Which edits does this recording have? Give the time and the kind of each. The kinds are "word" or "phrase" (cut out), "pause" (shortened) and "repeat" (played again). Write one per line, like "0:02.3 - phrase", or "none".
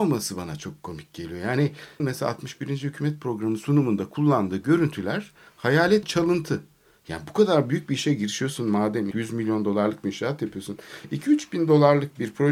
0:02.0 - word
0:06.0 - word
0:09.1 - word

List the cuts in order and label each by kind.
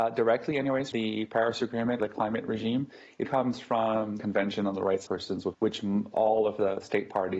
0:00.9 - word
0:02.0 - word
0:03.2 - word
0:04.2 - word
0:05.1 - word
0:05.5 - word
0:06.1 - word

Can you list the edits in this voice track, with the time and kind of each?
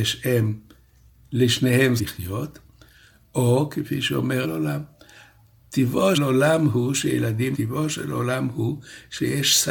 0:02.0 - word
0:04.4 - phrase
0:06.1 - word
0:07.5 - word

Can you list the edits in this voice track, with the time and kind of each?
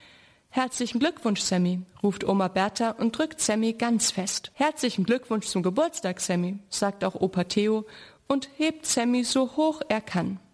0:04.5 - pause

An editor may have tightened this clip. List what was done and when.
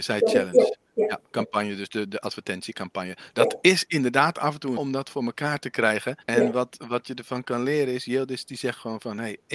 0:04.8 - phrase
0:06.2 - pause

